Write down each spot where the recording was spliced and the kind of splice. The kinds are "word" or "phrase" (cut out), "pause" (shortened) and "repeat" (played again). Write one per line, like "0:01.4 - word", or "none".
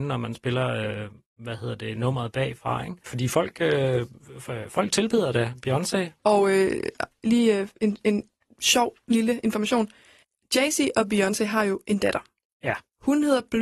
none

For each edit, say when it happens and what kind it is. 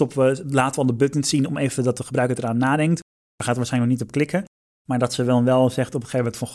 none

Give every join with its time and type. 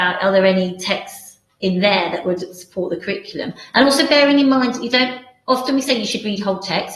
none

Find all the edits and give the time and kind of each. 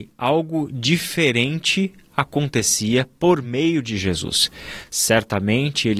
none

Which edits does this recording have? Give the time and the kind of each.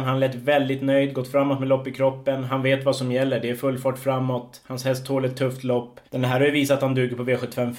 0:06.1 - pause

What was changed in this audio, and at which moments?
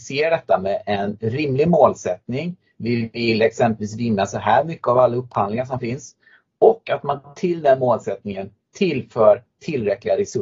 none

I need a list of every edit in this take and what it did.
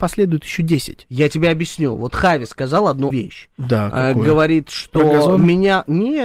0:03.1 - word

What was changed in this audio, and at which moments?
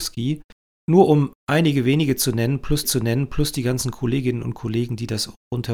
0:02.8 - repeat

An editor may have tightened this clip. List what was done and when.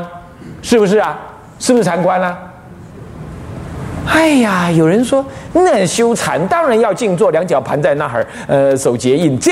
none

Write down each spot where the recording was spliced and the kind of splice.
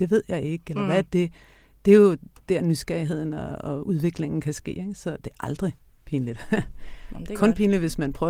none

